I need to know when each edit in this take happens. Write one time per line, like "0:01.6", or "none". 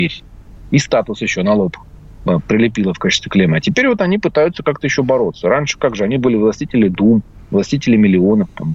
none